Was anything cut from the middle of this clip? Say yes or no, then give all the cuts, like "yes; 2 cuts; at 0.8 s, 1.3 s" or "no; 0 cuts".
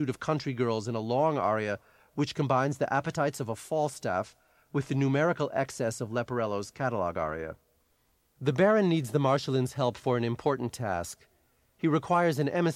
no; 0 cuts